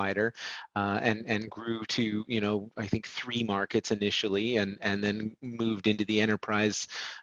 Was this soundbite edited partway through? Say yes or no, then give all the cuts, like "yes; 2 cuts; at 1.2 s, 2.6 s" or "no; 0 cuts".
no; 0 cuts